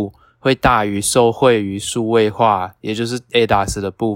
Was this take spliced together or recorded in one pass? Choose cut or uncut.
uncut